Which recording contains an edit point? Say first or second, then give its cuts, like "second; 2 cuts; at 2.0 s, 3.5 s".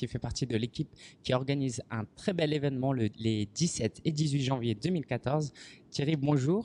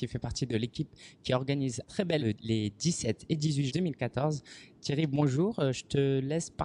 second; 3 cuts; at 1.8 s, 2.2 s, 3.7 s